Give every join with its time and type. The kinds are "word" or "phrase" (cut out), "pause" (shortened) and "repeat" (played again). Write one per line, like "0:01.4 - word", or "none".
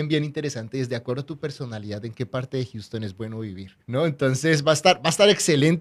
0:03.8 - pause